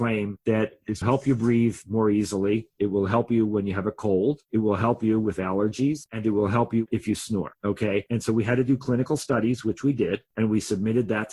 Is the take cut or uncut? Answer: cut